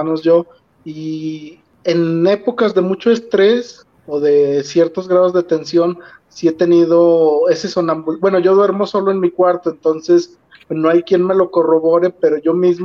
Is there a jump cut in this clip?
no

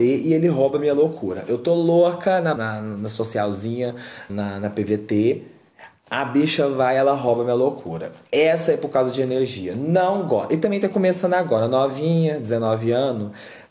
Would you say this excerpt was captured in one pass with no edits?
no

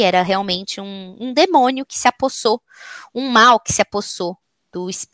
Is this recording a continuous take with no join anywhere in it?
yes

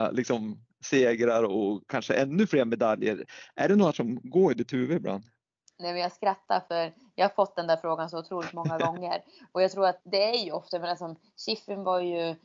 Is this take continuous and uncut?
no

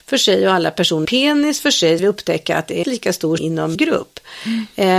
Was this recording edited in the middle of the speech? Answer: yes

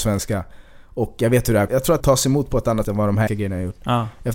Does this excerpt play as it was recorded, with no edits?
no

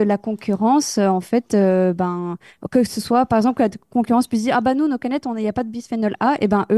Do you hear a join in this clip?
no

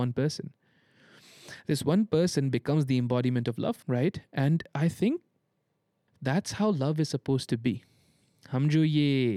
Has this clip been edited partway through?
yes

